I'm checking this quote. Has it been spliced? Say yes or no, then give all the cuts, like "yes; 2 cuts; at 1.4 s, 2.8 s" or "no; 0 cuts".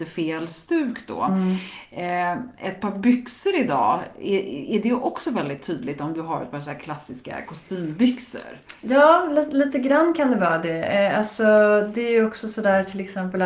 no; 0 cuts